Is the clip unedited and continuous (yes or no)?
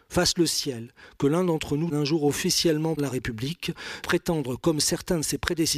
no